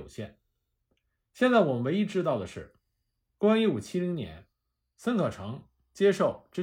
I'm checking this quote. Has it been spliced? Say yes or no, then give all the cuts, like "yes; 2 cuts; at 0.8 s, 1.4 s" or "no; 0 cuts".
no; 0 cuts